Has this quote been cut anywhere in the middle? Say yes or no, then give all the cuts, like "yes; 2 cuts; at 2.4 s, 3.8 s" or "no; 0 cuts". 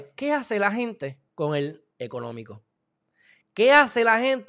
yes; 2 cuts; at 1.3 s, 1.9 s